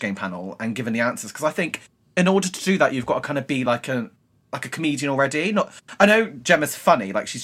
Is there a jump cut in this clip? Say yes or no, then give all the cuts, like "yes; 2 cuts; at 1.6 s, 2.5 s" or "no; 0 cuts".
no; 0 cuts